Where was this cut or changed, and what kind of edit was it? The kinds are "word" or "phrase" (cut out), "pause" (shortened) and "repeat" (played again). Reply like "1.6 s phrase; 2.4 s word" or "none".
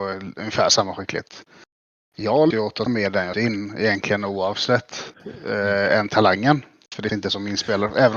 2.5 s word; 2.9 s word; 3.3 s word; 7.1 s word

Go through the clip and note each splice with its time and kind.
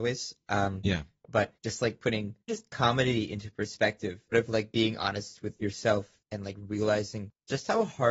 1.6 s pause; 2.5 s word; 4.3 s phrase; 6.2 s pause

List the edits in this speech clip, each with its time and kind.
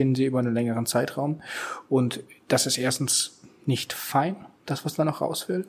4.5 s pause

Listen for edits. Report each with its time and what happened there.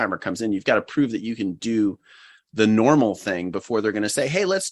none

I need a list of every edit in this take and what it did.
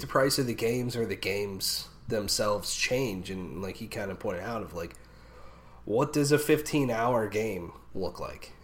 none

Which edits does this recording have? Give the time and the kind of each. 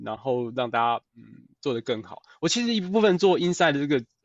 1.1 s pause

